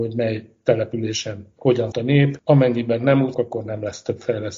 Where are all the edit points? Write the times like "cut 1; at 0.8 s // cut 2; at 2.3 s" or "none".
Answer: cut 1; at 1.9 s // cut 2; at 3.3 s